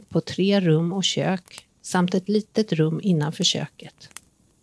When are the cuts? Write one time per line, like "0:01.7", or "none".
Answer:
none